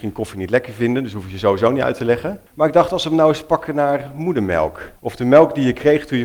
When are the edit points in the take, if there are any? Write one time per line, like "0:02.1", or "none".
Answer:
0:02.5
0:05.0